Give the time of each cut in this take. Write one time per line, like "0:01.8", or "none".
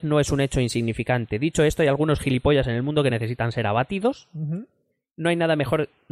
none